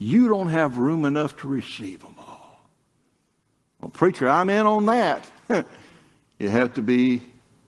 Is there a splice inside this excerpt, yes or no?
no